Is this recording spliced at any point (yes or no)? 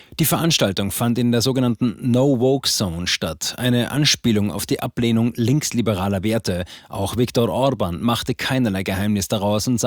no